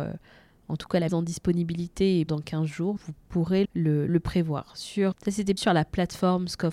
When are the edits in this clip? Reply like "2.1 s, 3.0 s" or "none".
1.1 s, 2.3 s, 3.0 s, 3.6 s, 4.1 s, 5.1 s, 5.6 s